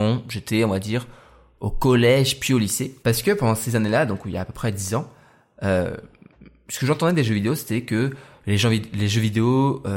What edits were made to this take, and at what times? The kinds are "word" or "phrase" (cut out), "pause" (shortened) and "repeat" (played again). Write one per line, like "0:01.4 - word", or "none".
0:03.0 - pause

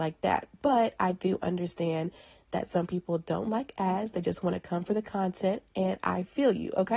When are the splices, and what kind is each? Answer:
none

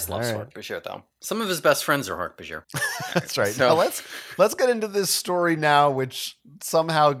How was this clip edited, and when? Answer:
0:02.6 - pause

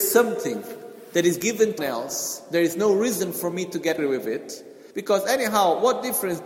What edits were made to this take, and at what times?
0:01.4 - word
0:01.8 - word
0:04.0 - word
0:04.9 - pause

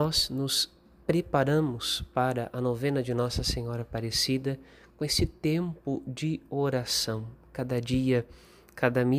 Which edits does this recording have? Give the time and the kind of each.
none

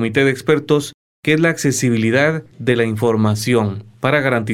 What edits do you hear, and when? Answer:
0:02.5 - pause

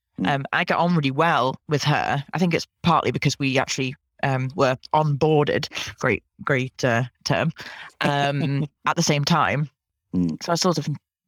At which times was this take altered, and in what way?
0:01.6 - pause

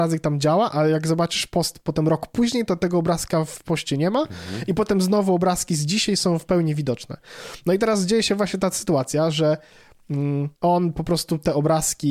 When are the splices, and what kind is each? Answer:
0:10.6 - pause

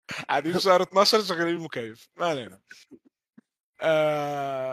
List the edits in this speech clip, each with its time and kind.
none

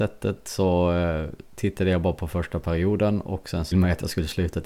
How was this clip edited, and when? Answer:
0:03.7 - phrase

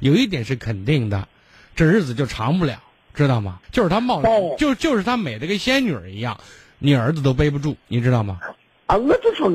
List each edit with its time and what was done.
0:03.6 - pause

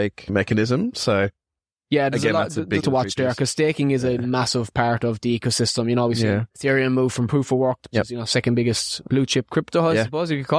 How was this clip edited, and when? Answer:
0:02.8 - phrase
0:07.9 - phrase

